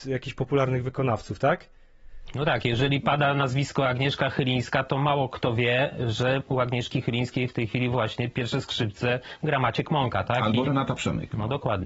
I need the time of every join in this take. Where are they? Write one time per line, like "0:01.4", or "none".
none